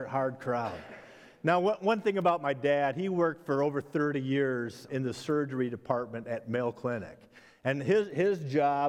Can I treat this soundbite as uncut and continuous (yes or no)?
no